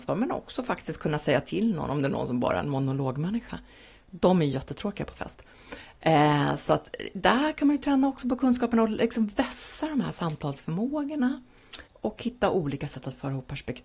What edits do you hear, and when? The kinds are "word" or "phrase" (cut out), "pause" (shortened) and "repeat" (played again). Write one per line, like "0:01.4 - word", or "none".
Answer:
0:11.9 - pause